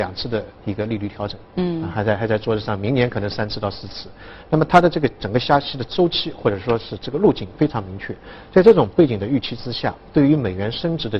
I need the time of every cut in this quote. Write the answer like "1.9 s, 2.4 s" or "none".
none